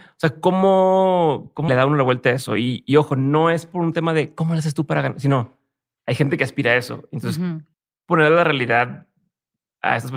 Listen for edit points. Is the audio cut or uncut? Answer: cut